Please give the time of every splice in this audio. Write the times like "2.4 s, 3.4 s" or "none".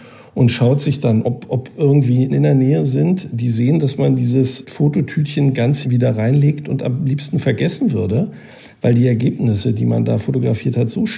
1.2 s, 2.3 s, 4.6 s, 5.8 s